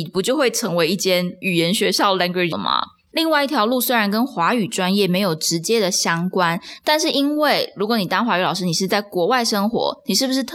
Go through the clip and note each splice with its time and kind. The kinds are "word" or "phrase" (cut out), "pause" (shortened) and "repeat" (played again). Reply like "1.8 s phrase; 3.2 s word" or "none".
2.5 s word